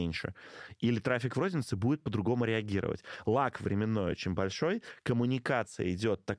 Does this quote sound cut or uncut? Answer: uncut